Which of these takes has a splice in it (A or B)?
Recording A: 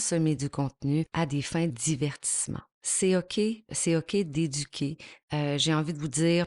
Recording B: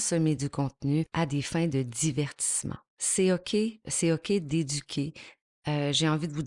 A